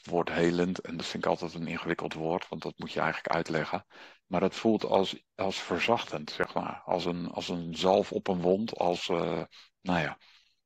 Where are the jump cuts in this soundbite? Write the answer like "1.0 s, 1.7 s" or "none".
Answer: none